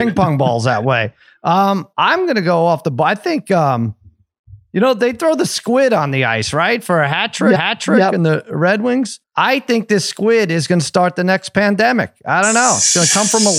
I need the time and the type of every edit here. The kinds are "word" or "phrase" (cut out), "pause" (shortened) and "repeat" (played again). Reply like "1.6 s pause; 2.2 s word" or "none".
1.9 s pause; 7.5 s repeat; 9.2 s pause